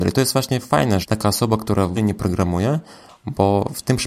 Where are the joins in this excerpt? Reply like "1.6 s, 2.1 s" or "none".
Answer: 1.0 s, 1.9 s